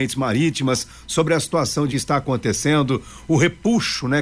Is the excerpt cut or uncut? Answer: cut